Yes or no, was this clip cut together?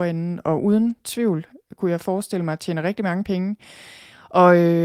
no